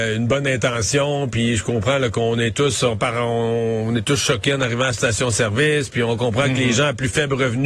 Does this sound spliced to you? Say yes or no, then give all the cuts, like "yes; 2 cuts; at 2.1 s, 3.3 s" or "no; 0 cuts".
no; 0 cuts